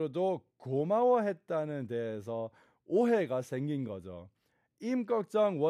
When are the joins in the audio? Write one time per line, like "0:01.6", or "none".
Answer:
none